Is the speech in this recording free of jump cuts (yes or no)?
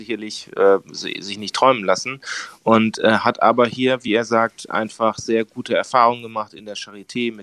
yes